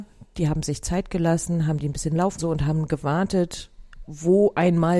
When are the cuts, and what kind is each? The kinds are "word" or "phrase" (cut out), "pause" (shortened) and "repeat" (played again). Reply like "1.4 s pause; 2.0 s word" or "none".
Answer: 2.4 s phrase